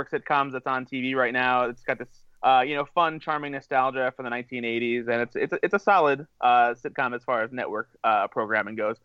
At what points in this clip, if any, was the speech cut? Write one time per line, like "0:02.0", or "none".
0:02.3
0:08.0